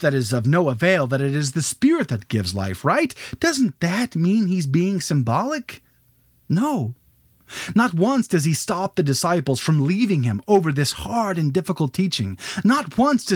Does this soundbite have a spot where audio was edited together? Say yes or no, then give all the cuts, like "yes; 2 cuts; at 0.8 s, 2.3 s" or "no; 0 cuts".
no; 0 cuts